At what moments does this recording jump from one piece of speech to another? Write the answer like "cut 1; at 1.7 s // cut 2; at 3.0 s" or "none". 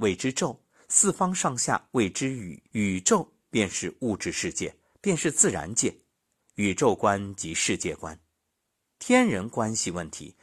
cut 1; at 2.7 s